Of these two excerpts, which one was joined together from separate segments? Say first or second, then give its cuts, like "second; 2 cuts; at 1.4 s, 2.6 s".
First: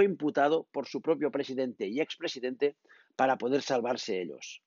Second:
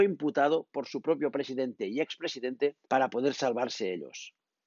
second; 1 cut; at 2.8 s